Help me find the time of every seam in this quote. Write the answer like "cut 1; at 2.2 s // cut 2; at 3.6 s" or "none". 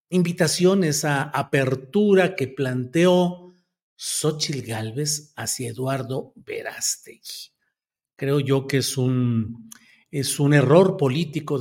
none